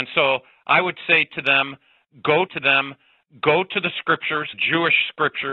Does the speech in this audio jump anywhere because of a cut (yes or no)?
yes